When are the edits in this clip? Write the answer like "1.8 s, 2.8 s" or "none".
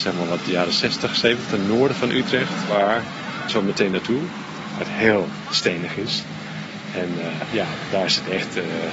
1.5 s, 3.5 s, 7.5 s